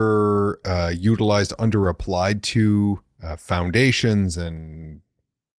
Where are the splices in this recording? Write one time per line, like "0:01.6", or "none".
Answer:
none